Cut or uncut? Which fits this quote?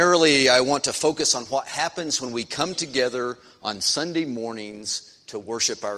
uncut